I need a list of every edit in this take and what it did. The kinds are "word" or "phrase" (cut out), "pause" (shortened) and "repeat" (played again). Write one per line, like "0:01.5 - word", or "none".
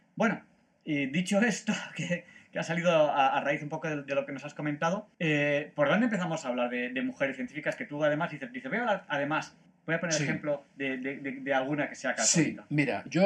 0:05.1 - pause
0:09.7 - pause
0:10.7 - pause